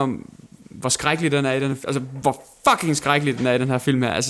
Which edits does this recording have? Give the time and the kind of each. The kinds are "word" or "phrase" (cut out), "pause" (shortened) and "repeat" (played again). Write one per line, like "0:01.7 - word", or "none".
none